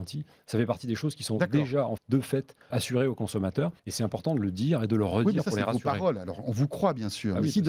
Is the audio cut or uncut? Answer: cut